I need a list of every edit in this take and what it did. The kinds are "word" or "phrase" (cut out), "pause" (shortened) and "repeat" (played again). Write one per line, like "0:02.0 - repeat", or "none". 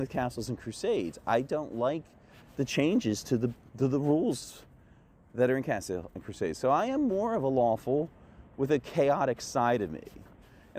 none